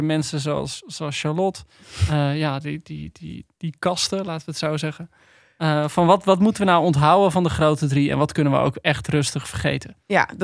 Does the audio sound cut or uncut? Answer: uncut